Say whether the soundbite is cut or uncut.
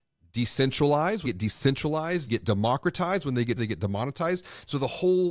cut